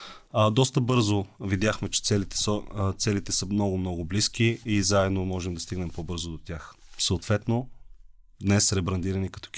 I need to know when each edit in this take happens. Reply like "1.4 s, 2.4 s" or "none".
none

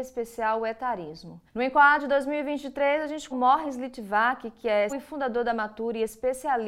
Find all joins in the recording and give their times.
1.5 s, 3.3 s, 4.9 s

